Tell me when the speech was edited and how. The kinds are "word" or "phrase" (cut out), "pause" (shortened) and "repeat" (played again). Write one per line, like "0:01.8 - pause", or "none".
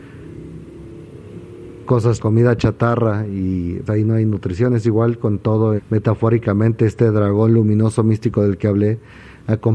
0:02.2 - word
0:03.9 - word
0:05.8 - word